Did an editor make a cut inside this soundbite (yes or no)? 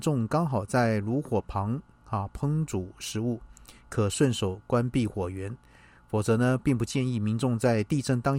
no